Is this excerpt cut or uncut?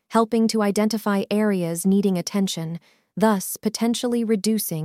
uncut